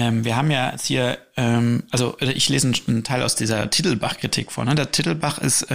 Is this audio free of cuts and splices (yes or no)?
yes